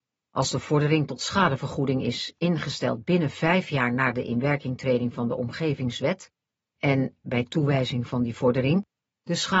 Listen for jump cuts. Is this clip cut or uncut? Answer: uncut